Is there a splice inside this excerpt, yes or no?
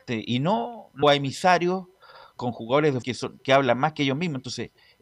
yes